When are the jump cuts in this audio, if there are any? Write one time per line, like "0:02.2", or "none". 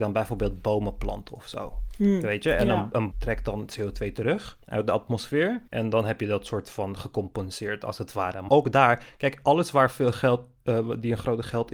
0:03.1
0:04.6
0:05.7
0:08.5